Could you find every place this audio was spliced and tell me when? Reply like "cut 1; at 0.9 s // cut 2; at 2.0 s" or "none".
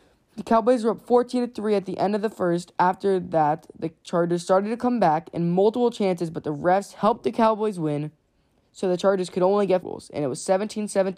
cut 1; at 9.8 s